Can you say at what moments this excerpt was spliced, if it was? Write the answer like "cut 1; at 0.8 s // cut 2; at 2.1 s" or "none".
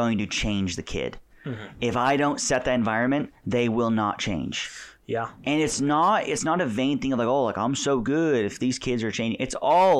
none